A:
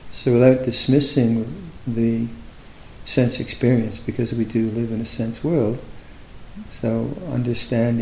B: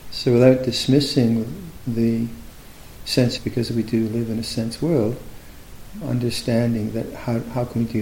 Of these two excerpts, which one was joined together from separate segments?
B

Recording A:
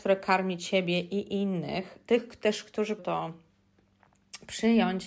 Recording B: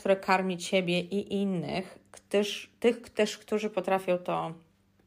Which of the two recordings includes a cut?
A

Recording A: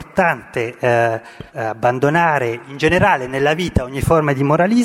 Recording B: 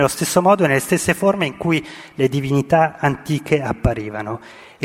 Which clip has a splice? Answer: A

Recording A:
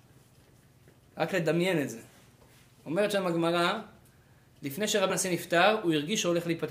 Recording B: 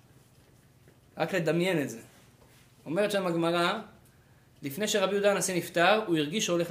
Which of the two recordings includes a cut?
A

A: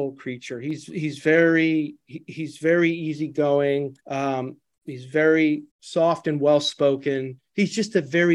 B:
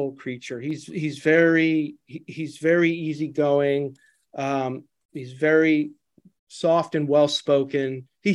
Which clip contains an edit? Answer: A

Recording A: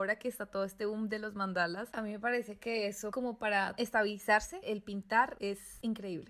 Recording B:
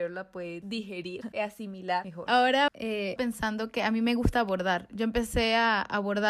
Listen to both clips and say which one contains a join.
B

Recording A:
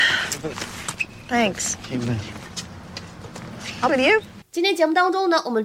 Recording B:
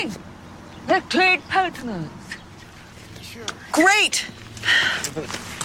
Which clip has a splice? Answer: A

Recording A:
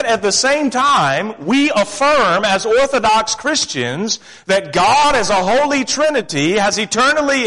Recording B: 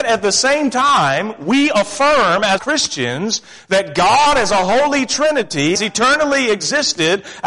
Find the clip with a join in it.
B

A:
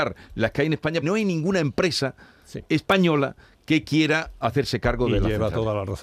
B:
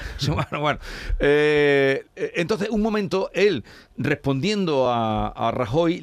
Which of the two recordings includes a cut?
A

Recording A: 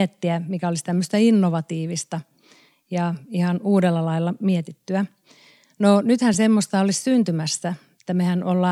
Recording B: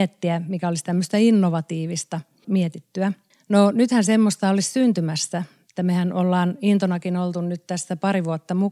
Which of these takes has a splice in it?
B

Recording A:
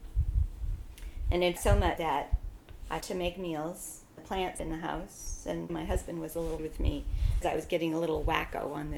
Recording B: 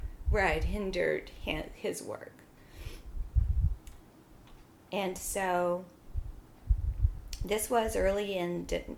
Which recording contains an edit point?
A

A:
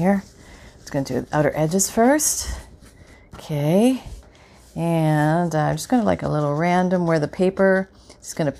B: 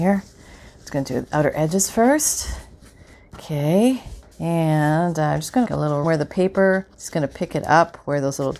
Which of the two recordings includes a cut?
B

